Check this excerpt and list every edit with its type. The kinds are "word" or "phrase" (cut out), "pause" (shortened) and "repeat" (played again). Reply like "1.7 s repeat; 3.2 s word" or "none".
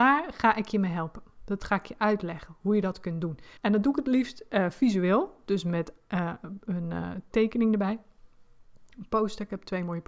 3.6 s pause